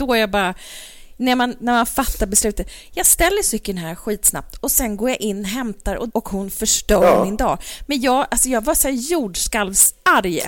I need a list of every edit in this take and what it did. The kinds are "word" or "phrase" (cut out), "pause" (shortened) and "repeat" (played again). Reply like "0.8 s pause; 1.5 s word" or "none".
6.1 s word